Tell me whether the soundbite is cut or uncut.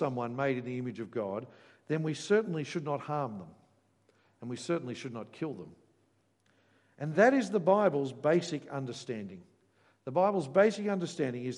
uncut